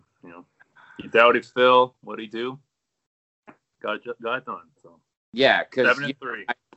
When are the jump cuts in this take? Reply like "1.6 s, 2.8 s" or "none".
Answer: 2.0 s